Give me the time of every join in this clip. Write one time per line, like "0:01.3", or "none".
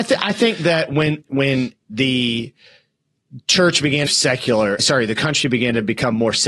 0:01.2
0:01.8
0:04.1
0:04.8